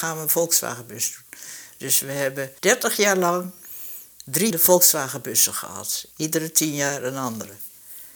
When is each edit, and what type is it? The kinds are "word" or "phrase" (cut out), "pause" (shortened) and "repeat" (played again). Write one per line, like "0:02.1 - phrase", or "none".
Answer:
0:02.6 - pause
0:04.5 - word
0:06.1 - pause